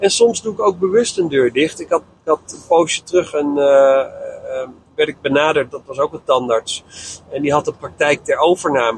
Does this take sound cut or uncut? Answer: uncut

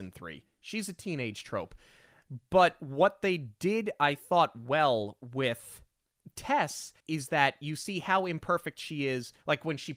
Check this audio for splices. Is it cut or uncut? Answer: cut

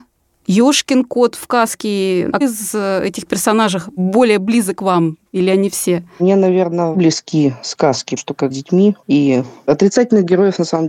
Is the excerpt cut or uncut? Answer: cut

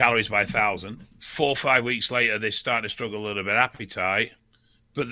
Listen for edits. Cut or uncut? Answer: cut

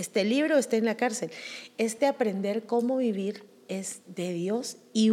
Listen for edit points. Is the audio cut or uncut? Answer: uncut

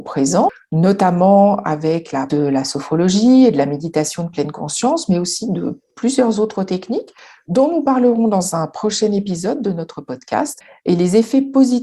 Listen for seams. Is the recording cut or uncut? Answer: cut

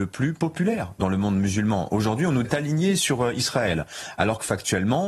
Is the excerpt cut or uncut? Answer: cut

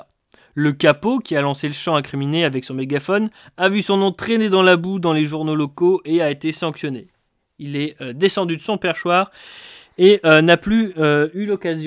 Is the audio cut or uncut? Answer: uncut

